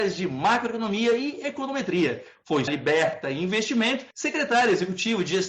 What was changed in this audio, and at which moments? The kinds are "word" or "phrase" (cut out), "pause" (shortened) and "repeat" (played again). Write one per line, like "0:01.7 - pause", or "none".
0:02.7 - phrase
0:04.1 - pause